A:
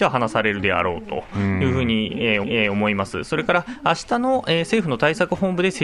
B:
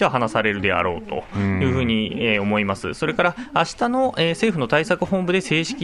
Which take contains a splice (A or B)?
A